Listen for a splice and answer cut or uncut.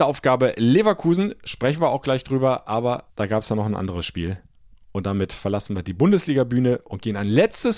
cut